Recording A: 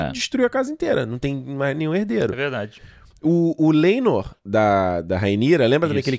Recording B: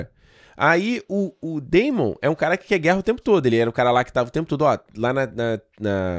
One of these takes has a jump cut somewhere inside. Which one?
A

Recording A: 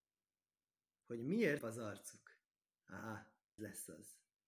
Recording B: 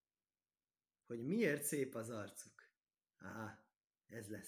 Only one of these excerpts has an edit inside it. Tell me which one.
A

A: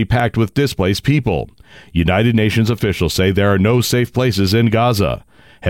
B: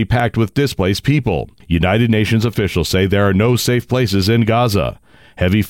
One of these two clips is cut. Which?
B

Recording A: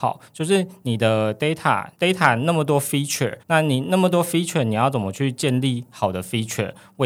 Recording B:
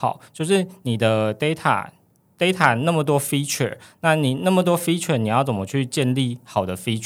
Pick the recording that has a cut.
A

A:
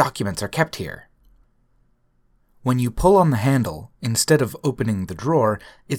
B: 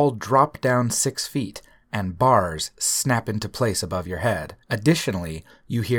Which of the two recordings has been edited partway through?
B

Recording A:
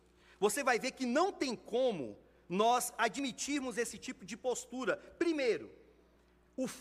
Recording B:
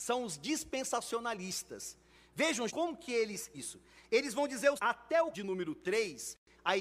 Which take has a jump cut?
B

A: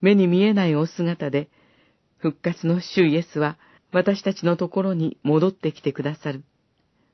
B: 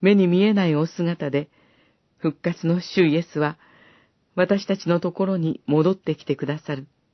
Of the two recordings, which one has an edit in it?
A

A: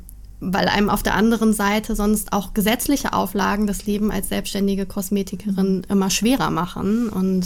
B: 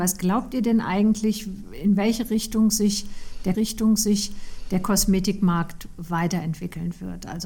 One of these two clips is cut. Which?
B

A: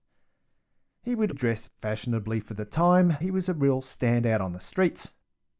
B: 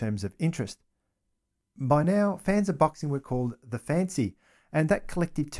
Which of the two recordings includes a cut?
A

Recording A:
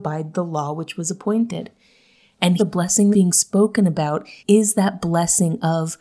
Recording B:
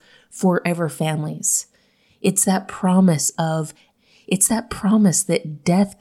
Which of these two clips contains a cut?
A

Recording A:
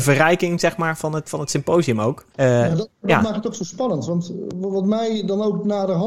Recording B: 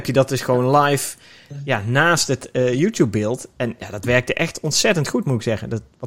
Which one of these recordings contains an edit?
A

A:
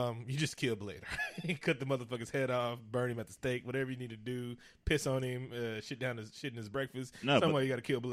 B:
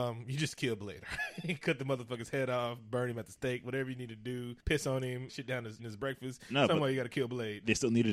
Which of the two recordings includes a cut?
B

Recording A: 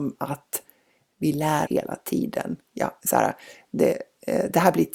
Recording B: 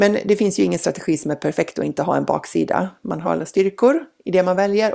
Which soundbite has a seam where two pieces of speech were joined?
A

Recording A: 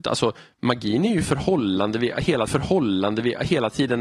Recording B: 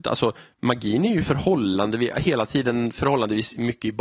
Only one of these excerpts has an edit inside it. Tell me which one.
A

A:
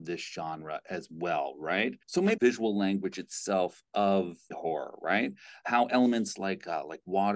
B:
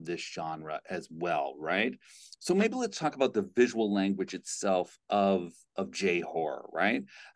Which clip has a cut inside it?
A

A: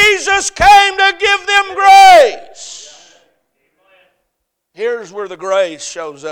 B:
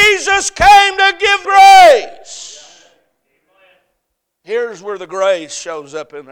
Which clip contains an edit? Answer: B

